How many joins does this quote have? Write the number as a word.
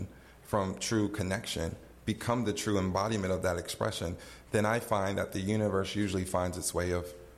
zero